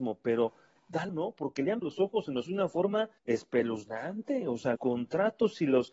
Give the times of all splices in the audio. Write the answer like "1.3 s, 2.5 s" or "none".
1.1 s, 1.8 s, 2.5 s, 3.2 s, 4.7 s